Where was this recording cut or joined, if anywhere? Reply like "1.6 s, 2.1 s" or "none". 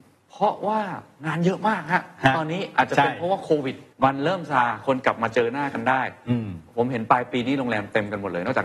3.9 s

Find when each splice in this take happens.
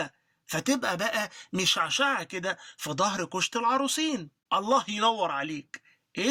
4.4 s

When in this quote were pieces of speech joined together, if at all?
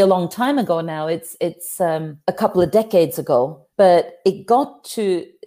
2.3 s, 3.7 s

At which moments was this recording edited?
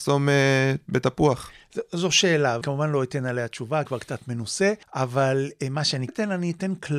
2.6 s, 3.9 s, 4.8 s, 6.1 s

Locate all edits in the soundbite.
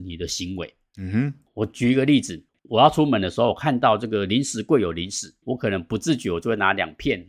5.4 s

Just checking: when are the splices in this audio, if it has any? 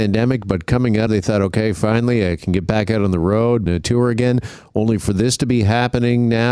1.1 s, 3.7 s

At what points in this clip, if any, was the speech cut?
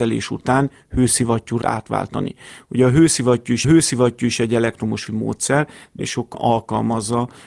1.6 s, 3.6 s, 5.1 s, 6.0 s, 6.3 s

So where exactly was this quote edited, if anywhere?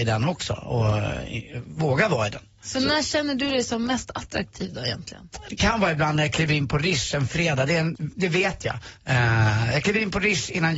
8.0 s

